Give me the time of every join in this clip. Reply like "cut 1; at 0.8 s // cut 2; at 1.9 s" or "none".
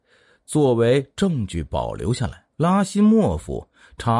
cut 1; at 2.5 s